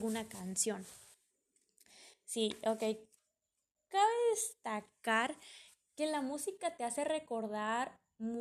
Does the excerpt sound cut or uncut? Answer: uncut